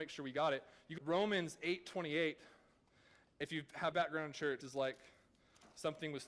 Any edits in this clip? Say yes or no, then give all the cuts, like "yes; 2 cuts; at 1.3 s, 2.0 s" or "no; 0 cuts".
yes; 3 cuts; at 1.0 s, 3.9 s, 4.6 s